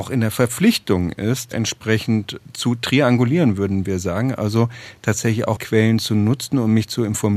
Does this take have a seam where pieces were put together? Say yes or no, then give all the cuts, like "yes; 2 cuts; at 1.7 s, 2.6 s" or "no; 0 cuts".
yes; 2 cuts; at 1.5 s, 5.6 s